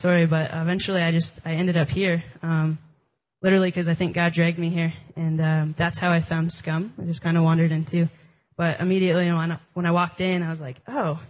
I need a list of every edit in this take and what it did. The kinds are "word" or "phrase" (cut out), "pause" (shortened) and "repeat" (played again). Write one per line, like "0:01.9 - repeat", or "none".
none